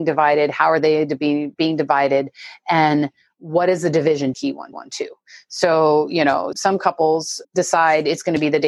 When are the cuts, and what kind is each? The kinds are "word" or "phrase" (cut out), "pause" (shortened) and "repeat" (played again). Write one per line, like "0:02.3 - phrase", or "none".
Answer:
0:01.5 - pause
0:04.3 - phrase
0:04.7 - repeat
0:06.5 - word
0:07.4 - word